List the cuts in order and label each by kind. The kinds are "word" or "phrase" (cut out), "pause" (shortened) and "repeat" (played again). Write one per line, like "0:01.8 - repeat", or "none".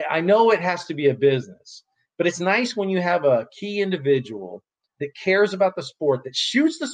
none